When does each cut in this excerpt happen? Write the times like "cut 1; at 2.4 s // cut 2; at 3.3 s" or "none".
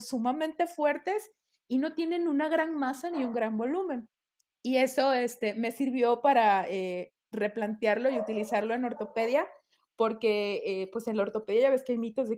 none